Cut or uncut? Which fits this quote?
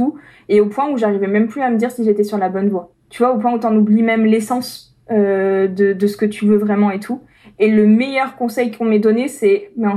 uncut